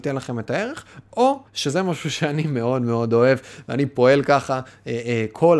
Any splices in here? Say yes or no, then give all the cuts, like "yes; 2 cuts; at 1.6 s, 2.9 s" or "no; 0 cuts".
yes; 1 cut; at 1.5 s